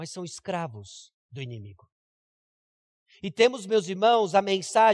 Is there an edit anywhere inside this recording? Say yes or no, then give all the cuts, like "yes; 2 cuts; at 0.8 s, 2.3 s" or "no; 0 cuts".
no; 0 cuts